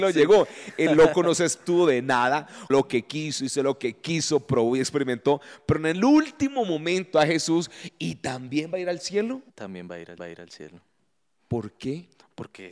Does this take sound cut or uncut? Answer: cut